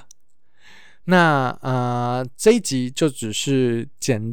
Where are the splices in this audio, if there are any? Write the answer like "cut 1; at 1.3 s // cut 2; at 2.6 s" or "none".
cut 1; at 1.0 s